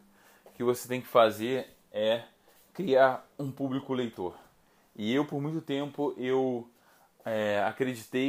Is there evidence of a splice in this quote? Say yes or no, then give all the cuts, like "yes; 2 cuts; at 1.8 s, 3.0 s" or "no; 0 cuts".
no; 0 cuts